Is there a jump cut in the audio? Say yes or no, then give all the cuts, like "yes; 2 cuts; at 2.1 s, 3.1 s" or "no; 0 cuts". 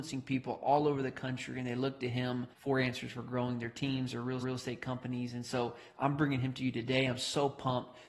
yes; 2 cuts; at 2.5 s, 4.4 s